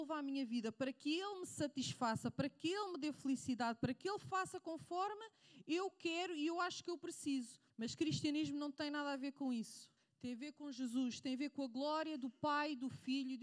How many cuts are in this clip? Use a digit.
2